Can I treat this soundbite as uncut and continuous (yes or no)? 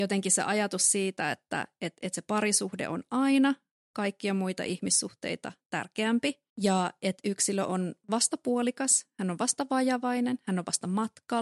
no